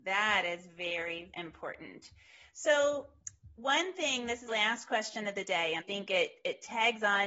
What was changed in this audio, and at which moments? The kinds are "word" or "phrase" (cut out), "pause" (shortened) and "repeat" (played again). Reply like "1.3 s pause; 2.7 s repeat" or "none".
1.3 s word; 4.5 s word; 5.8 s word

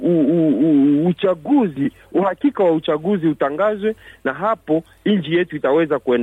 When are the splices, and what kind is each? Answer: none

